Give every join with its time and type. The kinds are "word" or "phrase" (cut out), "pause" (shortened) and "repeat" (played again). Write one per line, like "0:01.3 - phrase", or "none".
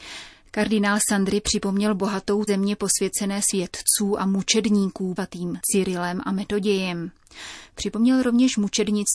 0:02.5 - word
0:03.5 - word
0:05.2 - word